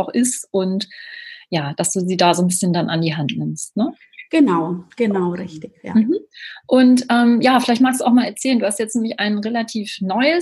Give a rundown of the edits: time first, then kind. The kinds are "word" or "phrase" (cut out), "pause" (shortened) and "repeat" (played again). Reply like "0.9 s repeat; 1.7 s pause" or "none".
4.9 s pause

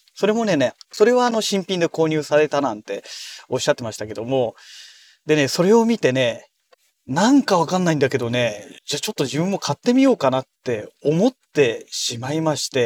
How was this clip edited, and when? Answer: 6.6 s pause; 8.8 s pause

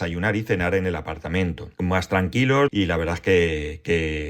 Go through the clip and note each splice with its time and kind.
1.7 s pause; 2.7 s word

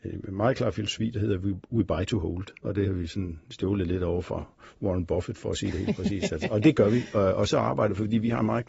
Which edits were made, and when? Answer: none

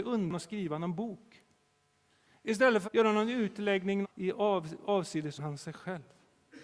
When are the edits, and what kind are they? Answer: 2.8 s word; 4.0 s word; 5.4 s word

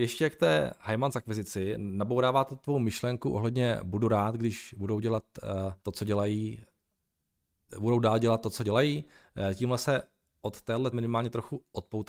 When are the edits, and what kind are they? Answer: 5.8 s pause; 10.9 s word

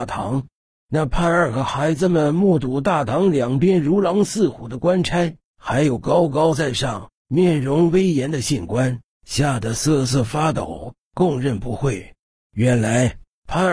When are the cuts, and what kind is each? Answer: none

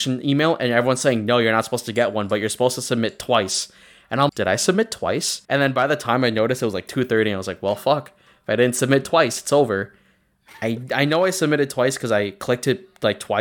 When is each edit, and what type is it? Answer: 4.3 s word; 5.4 s pause

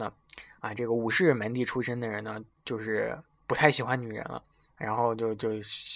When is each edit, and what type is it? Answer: 4.7 s word

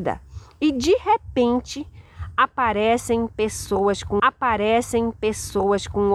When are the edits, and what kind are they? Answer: 4.2 s repeat

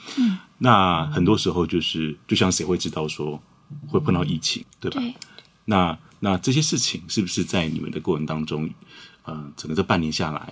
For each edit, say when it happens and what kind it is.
4.6 s word

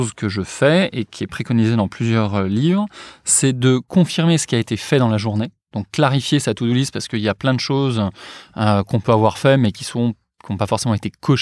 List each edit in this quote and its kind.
none

